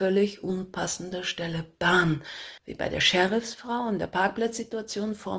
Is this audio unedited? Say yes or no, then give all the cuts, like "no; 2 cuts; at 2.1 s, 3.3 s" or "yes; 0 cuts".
no; 1 cut; at 2.6 s